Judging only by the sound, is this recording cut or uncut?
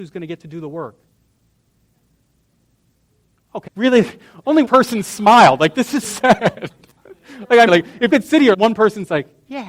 cut